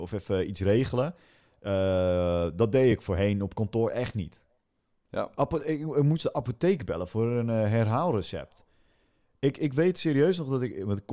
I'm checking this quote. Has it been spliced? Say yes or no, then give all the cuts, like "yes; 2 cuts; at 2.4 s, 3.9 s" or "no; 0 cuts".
no; 0 cuts